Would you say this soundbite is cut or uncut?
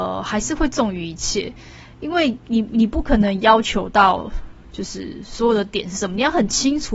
uncut